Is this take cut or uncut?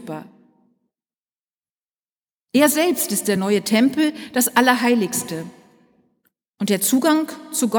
uncut